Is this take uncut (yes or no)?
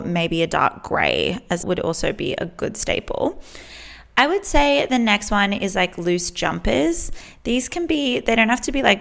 no